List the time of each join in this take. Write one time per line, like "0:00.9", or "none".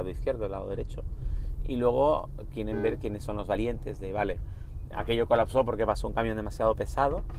none